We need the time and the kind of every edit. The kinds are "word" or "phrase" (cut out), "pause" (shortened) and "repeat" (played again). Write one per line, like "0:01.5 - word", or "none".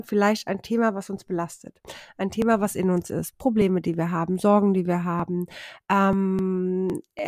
none